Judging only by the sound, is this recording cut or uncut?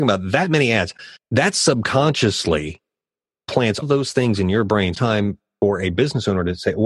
cut